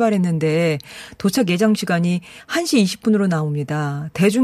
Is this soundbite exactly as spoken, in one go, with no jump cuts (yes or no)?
yes